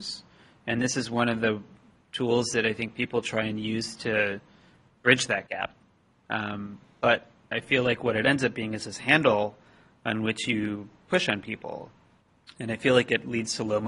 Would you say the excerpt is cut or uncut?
uncut